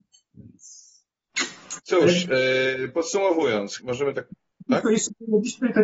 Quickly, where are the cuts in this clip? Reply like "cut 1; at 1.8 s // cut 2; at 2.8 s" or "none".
cut 1; at 1.8 s // cut 2; at 3.8 s